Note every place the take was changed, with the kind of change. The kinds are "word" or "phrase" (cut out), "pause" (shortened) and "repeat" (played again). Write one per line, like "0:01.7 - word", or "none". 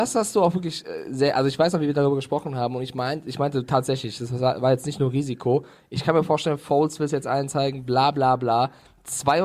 none